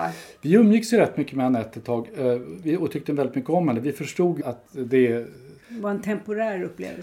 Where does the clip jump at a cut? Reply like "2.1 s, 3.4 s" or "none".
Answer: 4.4 s, 5.6 s